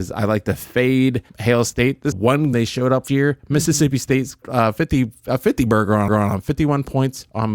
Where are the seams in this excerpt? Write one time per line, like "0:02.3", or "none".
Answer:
0:01.3
0:02.1
0:02.5
0:03.1
0:04.4
0:06.1